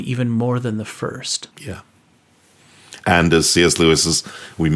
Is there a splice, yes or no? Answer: yes